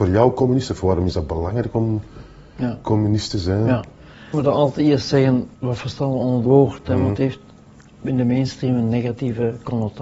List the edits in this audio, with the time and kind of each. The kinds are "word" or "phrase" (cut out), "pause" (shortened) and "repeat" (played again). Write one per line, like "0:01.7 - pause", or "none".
0:04.3 - word
0:05.5 - pause
0:06.5 - word
0:07.2 - word

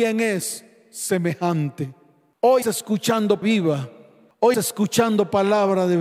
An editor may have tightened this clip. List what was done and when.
0:02.6 - word
0:03.4 - word
0:04.5 - word

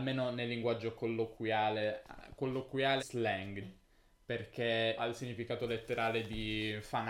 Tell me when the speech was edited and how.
0:03.0 - word
0:03.6 - word
0:05.0 - word

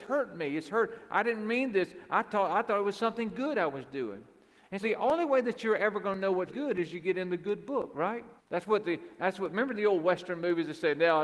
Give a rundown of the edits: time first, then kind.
0:04.8 - word
0:06.5 - word
0:08.4 - pause

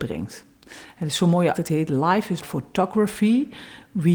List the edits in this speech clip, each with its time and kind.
0:01.5 - word
0:02.4 - word

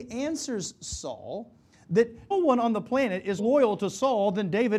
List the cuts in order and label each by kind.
0:02.3 - word
0:03.4 - word

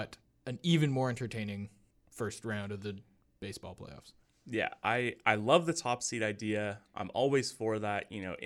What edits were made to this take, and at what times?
none

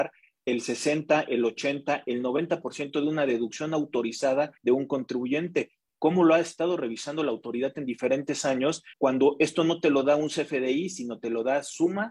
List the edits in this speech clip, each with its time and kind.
0:04.6 - pause
0:08.9 - pause

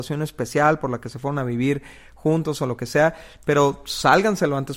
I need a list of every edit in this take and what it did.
none

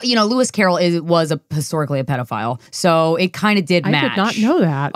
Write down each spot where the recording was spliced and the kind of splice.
0:02.7 - pause

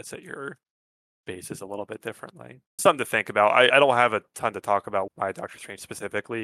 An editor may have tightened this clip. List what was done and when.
0:02.8 - word
0:03.7 - word
0:05.1 - word

